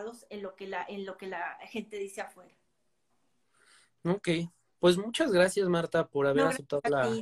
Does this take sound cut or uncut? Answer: uncut